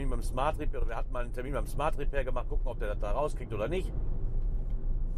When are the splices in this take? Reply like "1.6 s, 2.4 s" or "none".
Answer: none